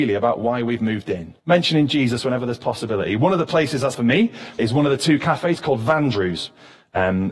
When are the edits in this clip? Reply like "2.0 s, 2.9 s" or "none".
1.4 s, 3.9 s, 4.6 s

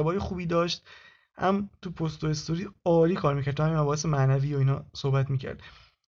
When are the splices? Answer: none

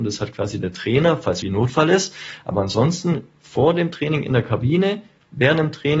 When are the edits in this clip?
1.4 s

